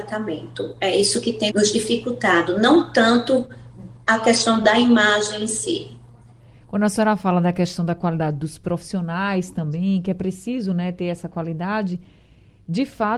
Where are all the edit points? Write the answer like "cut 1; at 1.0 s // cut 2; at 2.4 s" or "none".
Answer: cut 1; at 1.5 s // cut 2; at 4.0 s